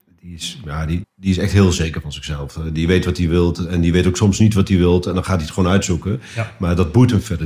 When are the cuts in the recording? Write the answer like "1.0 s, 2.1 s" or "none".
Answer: 1.0 s